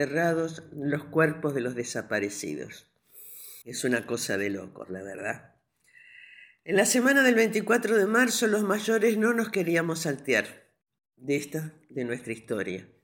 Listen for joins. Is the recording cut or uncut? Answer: cut